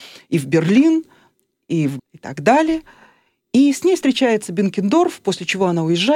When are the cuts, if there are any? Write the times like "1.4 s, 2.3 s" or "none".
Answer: 2.0 s